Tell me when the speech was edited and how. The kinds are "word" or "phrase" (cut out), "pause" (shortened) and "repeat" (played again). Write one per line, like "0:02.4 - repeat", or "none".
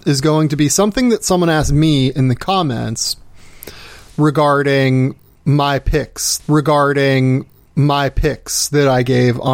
0:06.4 - repeat